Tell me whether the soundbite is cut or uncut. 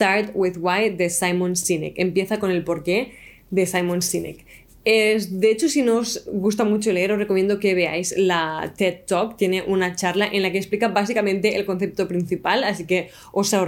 uncut